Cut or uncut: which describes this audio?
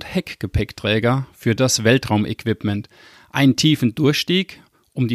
uncut